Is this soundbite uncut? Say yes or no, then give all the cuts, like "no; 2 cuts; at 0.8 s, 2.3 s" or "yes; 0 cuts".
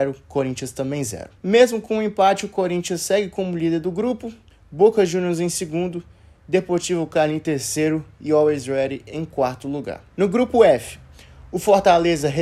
no; 2 cuts; at 1.4 s, 10.1 s